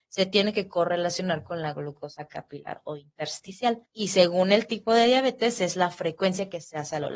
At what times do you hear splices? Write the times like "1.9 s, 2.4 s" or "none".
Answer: 3.9 s